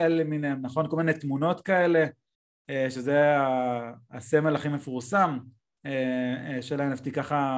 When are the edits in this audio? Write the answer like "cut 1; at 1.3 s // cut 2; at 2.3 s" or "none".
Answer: none